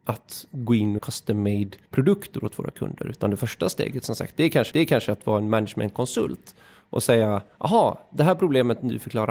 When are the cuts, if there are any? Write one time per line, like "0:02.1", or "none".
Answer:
0:01.0
0:01.8
0:04.7